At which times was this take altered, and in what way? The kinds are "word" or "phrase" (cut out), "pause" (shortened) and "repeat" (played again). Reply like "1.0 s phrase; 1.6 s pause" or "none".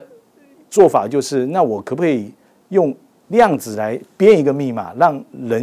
none

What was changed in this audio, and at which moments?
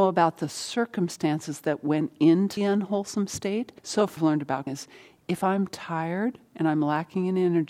2.6 s word; 3.8 s pause; 4.2 s phrase; 4.7 s word

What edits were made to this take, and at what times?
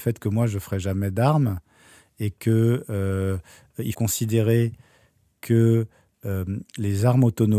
3.9 s word

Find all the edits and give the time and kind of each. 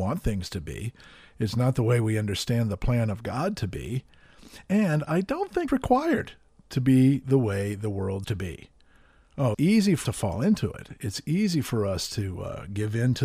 5.7 s word; 8.2 s word; 9.5 s word; 10.0 s word

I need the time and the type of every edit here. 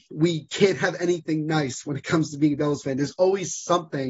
none

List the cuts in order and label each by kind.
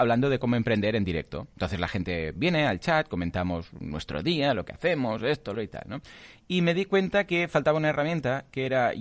5.5 s word

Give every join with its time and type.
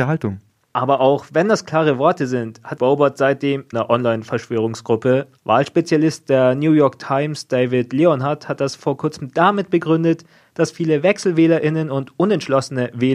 2.8 s word; 3.7 s phrase; 5.4 s pause

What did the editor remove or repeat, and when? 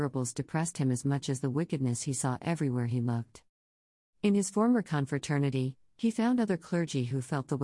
none

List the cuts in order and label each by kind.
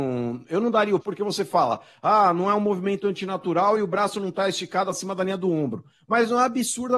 1.0 s word

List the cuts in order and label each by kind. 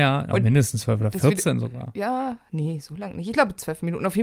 none

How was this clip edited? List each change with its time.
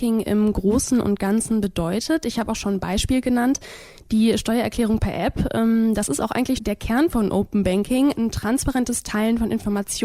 6.6 s word; 8.1 s word

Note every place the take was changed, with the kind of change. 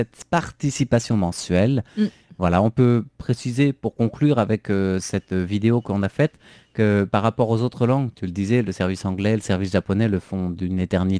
none

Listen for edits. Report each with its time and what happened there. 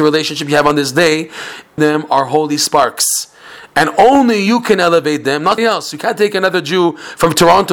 1.8 s phrase; 5.6 s word

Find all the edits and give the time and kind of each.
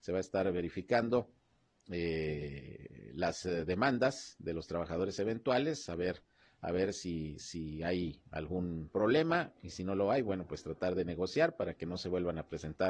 none

